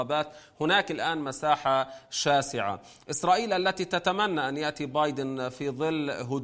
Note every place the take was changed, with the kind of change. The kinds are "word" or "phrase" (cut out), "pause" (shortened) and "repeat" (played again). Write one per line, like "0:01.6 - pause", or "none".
none